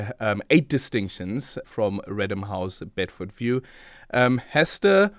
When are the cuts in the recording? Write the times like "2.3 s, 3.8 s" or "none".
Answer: 1.6 s